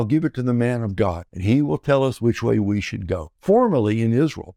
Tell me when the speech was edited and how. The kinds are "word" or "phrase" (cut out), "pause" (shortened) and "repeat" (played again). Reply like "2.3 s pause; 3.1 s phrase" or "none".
1.3 s pause; 3.4 s pause